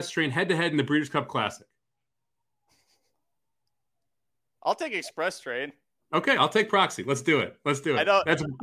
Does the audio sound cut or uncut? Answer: uncut